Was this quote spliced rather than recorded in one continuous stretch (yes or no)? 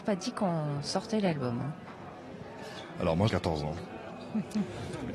yes